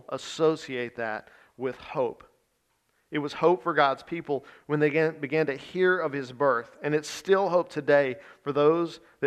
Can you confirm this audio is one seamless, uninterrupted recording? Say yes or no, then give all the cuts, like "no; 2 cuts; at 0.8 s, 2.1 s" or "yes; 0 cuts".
yes; 0 cuts